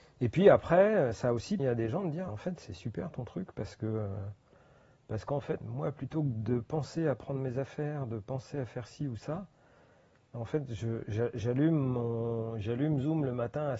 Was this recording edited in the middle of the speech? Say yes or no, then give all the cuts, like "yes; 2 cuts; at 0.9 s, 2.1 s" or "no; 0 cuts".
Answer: yes; 3 cuts; at 1.6 s, 2.3 s, 5.6 s